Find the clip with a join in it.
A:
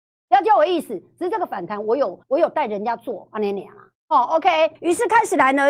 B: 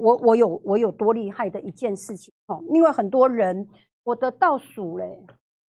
A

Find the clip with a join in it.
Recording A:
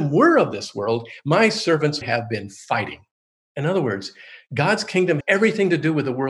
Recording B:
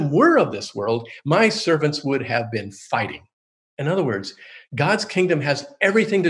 A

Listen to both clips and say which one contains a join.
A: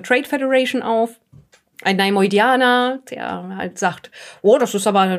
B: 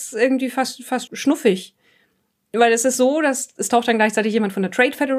B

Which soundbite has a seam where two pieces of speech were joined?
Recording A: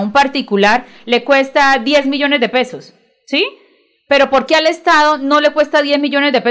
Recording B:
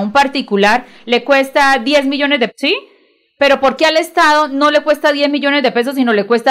B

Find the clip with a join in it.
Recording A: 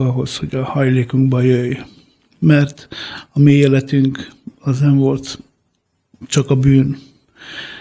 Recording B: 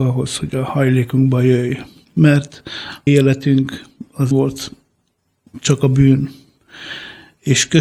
B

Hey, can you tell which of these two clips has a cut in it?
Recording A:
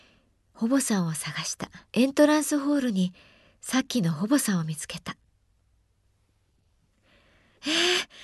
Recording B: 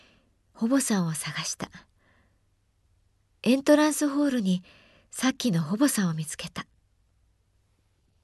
A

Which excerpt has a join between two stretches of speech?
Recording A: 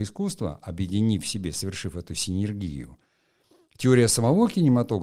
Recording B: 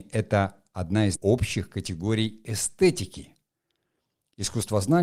B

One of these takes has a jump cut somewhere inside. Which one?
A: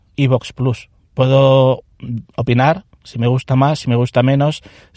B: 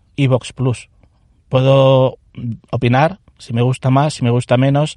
A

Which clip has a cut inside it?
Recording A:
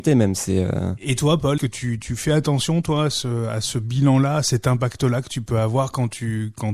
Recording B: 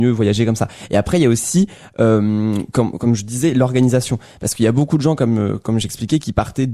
A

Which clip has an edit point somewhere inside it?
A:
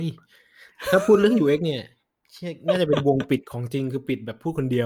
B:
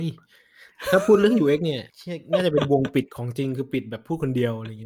B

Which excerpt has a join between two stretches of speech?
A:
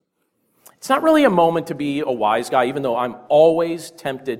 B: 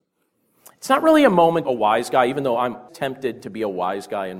B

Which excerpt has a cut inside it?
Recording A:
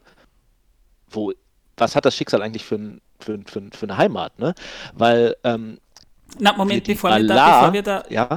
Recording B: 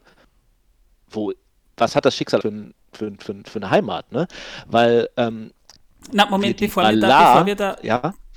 B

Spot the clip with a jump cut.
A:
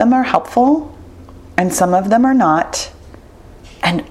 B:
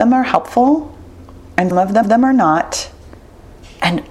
B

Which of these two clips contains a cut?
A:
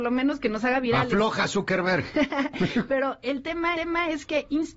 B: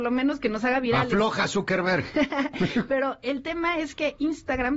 A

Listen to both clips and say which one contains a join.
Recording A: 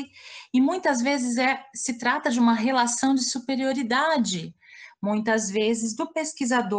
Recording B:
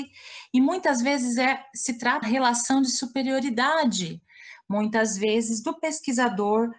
B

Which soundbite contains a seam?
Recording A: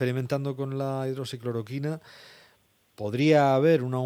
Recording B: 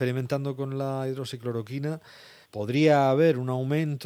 B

